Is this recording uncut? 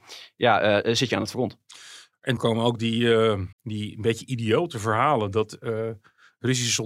no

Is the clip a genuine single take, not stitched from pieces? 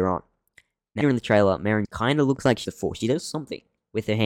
no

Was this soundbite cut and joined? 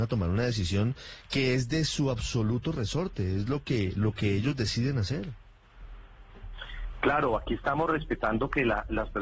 no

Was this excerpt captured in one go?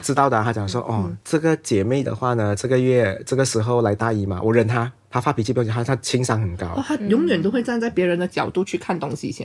no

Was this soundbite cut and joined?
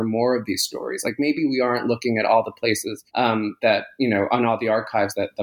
yes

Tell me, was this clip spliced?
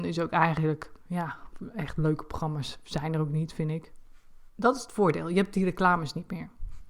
yes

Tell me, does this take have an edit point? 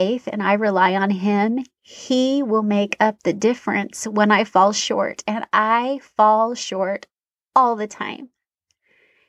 no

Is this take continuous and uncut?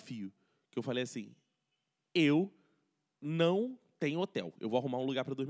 yes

